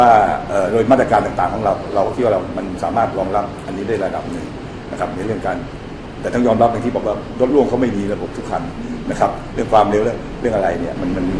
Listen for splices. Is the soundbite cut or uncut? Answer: cut